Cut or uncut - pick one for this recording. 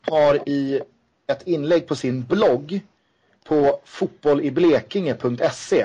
uncut